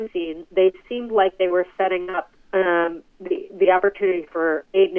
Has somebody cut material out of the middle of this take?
yes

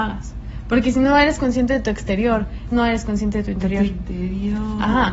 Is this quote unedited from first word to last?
no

